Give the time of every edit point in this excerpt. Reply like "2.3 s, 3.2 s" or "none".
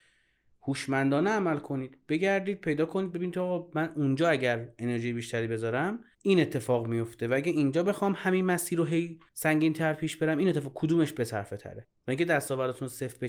6.1 s, 9.3 s